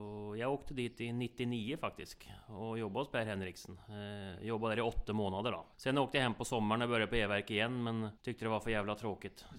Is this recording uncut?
no; 2 cuts; at 5.7 s, 8.2 s

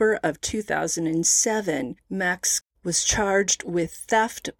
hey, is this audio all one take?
no; 1 cut; at 2.6 s

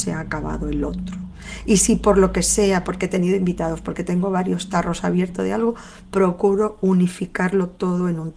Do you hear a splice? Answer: no; 0 cuts

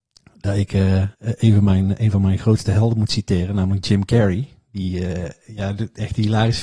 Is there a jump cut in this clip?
yes; 1 cut; at 1.1 s

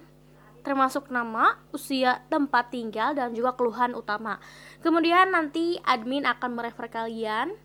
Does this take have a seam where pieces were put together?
no; 0 cuts

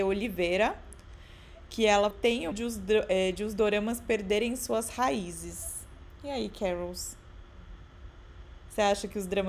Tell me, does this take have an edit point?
yes; 2 cuts; at 2.1 s, 2.5 s

